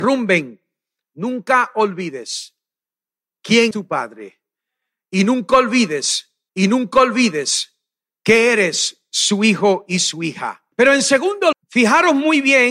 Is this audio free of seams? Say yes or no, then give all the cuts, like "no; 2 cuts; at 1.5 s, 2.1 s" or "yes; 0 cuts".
no; 4 cuts; at 3.7 s, 6.5 s, 10.7 s, 11.5 s